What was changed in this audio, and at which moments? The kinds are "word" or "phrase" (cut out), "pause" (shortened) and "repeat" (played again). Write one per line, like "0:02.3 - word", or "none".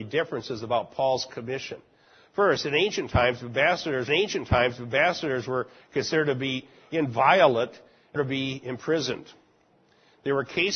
0:04.1 - repeat
0:08.2 - phrase